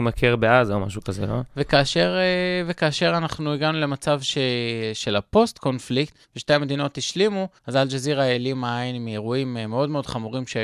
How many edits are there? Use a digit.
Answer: 2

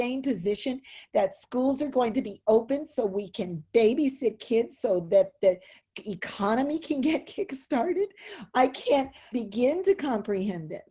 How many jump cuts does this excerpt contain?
1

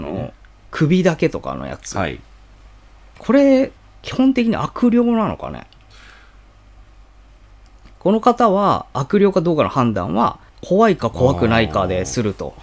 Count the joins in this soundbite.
2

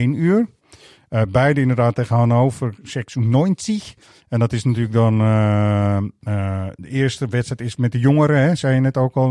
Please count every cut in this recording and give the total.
0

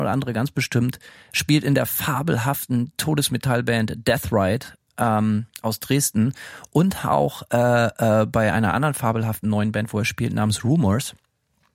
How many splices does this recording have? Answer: 0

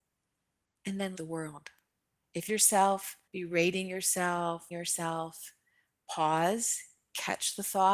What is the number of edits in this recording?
5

